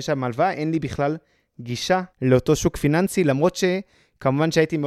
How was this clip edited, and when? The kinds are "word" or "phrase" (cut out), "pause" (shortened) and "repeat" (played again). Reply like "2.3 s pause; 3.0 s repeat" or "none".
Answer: 2.1 s pause